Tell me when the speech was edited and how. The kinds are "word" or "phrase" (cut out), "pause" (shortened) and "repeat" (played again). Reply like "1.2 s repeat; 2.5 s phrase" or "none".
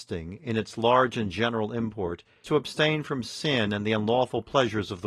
2.4 s word